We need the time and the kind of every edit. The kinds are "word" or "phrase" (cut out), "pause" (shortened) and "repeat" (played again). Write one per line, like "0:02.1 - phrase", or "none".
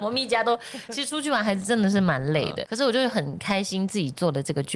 0:02.6 - word